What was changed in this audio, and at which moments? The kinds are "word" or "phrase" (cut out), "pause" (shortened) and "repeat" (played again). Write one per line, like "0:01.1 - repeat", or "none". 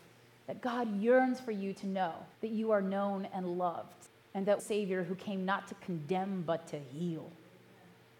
0:02.3 - pause
0:04.1 - pause
0:04.6 - phrase